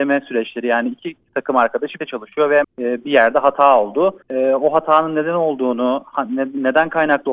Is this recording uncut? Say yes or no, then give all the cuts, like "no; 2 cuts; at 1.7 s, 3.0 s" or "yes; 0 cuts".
no; 3 cuts; at 2.0 s, 2.6 s, 4.2 s